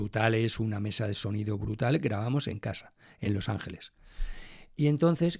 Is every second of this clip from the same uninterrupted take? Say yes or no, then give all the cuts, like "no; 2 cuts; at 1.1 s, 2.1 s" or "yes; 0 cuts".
yes; 0 cuts